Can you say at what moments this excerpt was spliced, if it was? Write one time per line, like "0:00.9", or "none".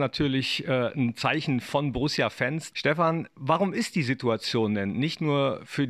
none